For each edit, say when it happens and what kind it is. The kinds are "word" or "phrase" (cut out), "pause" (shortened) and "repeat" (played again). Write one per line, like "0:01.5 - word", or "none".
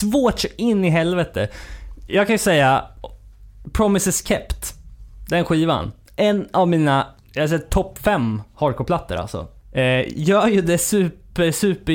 none